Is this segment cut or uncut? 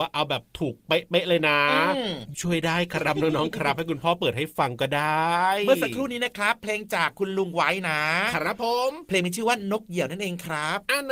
cut